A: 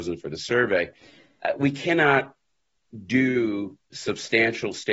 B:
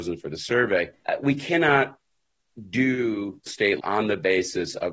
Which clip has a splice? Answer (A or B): B